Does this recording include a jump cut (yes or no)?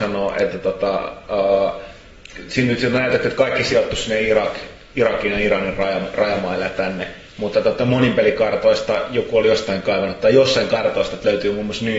yes